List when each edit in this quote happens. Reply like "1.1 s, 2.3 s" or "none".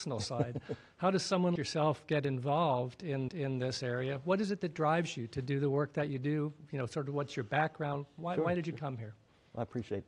1.6 s, 3.3 s